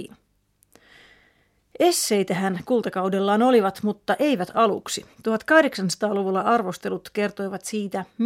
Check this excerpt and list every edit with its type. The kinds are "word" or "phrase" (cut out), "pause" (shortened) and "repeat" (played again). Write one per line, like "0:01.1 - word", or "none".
0:02.6 - word
0:05.1 - pause